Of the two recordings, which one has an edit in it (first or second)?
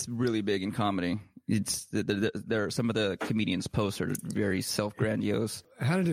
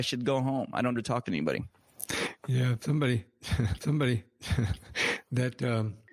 second